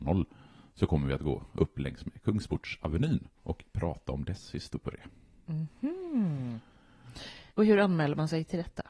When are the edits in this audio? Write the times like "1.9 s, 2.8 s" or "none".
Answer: 3.4 s, 7.5 s